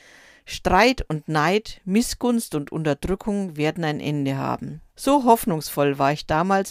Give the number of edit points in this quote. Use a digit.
1